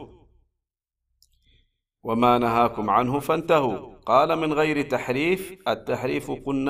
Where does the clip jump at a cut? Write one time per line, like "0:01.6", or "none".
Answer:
none